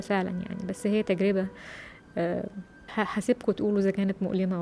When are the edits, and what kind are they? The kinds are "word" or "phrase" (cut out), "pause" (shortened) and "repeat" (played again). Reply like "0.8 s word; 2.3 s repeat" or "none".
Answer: 2.9 s word